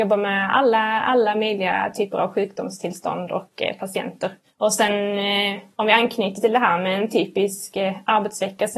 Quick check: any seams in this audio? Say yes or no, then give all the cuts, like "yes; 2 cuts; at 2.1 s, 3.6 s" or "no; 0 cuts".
no; 0 cuts